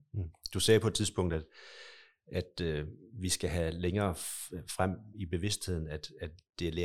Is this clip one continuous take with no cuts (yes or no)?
yes